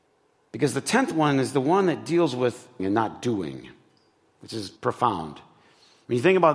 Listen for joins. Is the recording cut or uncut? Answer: cut